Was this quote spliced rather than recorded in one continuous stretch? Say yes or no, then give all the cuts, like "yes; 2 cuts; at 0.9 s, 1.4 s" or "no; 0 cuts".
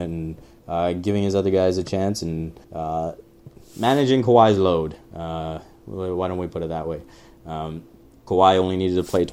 yes; 2 cuts; at 2.6 s, 8.1 s